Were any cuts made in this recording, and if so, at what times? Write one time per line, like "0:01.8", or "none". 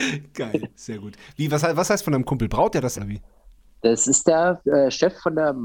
0:02.9